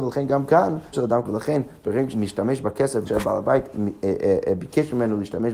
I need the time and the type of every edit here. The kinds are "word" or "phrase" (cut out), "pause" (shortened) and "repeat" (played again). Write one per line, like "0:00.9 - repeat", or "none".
0:00.9 - word
0:01.2 - word
0:02.1 - word
0:03.1 - word